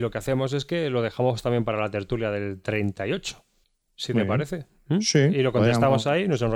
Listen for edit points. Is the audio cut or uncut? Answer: cut